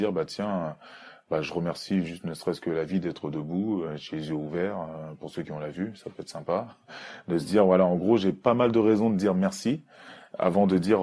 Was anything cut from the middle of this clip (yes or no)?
no